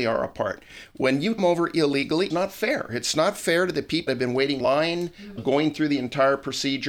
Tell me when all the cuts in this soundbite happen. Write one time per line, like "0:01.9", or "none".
0:01.4
0:02.3
0:04.1
0:04.6
0:05.4